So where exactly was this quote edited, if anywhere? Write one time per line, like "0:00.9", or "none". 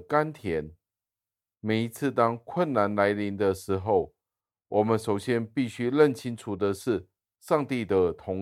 none